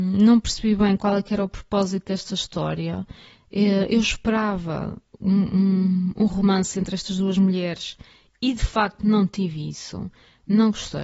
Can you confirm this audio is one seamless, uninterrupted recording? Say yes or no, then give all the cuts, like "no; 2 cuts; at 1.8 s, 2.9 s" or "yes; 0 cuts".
yes; 0 cuts